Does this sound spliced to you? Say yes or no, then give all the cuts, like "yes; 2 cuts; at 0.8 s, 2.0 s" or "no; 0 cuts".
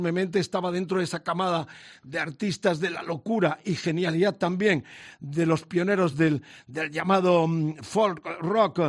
no; 0 cuts